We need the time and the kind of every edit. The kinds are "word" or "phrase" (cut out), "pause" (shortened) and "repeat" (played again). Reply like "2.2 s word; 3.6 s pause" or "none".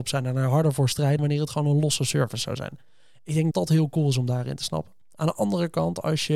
1.2 s word; 3.5 s word

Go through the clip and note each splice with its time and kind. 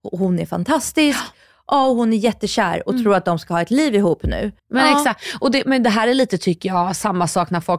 4.6 s pause

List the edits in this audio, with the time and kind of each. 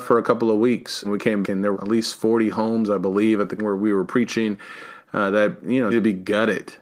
1.0 s word; 1.4 s word; 1.7 s word; 3.6 s word; 5.9 s word

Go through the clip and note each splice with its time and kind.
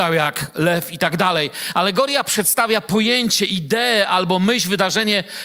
none

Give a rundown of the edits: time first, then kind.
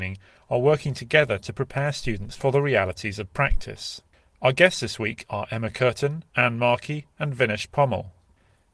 6.3 s pause

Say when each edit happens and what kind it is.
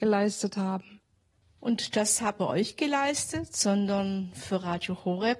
2.4 s phrase

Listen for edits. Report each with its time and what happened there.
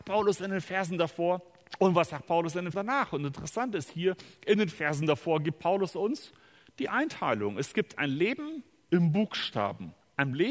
2.7 s word

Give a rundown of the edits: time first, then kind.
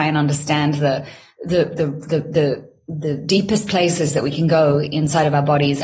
none

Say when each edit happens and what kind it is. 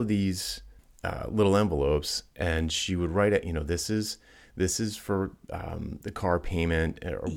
none

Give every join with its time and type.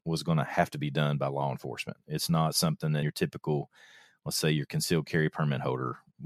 3.0 s word

